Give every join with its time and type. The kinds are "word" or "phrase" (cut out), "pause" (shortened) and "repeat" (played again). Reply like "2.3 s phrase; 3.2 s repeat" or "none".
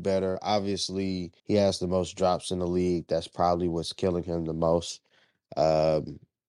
1.4 s pause